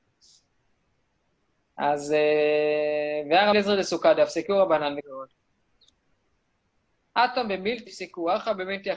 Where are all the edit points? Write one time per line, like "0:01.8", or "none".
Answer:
0:03.5
0:05.0
0:07.9